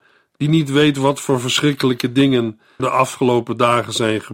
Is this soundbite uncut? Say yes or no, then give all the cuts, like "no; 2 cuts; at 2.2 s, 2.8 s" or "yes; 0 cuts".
no; 1 cut; at 2.8 s